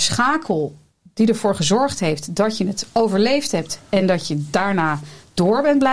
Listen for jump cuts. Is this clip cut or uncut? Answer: uncut